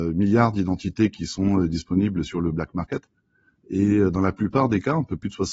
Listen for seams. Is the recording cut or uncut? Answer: uncut